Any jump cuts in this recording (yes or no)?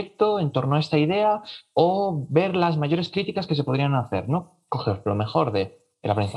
no